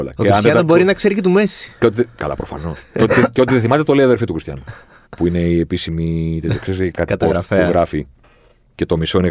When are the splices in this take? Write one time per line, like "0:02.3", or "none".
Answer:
0:05.1
0:06.9